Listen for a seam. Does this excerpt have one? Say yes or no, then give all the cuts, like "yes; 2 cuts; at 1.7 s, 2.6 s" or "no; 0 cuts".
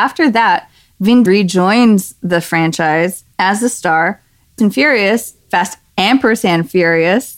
yes; 3 cuts; at 1.3 s, 3.3 s, 4.6 s